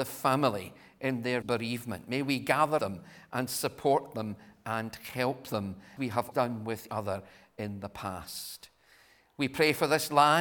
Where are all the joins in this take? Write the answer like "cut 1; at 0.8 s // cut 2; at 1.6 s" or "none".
cut 1; at 1.4 s // cut 2; at 2.8 s // cut 3; at 6.0 s // cut 4; at 6.3 s // cut 5; at 6.9 s